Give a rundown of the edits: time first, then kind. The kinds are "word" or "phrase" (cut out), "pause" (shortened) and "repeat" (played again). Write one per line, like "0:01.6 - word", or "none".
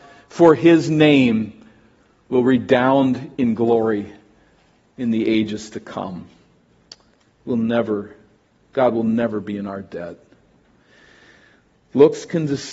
0:03.3 - pause

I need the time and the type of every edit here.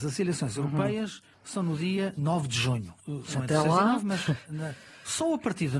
none

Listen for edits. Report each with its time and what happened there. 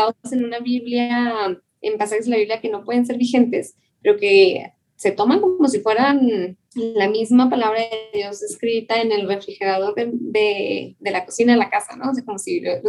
0:06.6 - pause

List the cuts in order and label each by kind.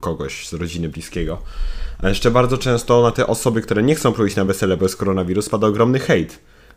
none

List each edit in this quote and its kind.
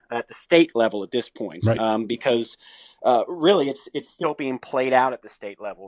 none

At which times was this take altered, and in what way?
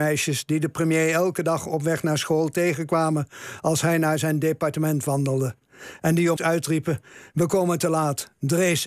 0:06.4 - phrase

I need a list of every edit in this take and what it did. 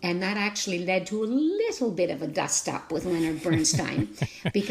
none

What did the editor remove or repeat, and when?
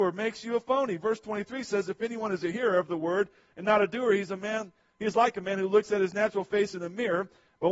none

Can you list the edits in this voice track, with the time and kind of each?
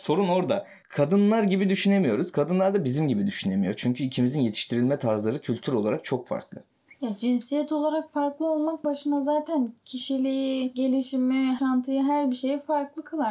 0:08.8 - word

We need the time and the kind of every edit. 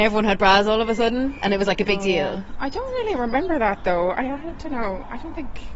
none

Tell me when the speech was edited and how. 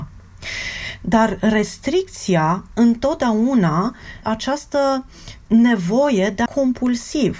0:04.2 - word
0:06.5 - word

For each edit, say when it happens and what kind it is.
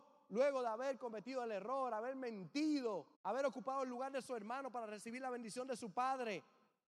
0:03.1 - pause

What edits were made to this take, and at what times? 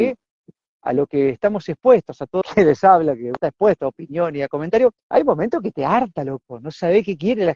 0:02.4 - phrase
0:03.4 - word
0:05.0 - pause

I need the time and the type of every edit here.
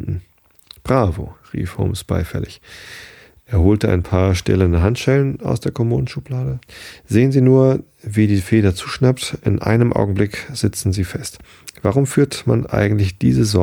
none

